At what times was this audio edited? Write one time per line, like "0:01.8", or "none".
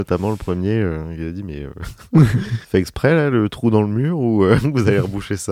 0:02.6